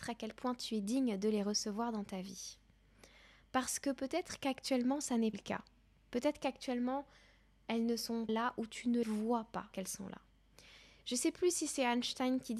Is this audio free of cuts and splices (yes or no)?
no